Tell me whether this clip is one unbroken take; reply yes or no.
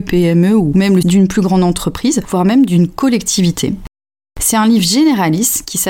no